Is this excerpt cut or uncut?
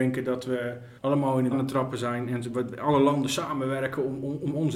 cut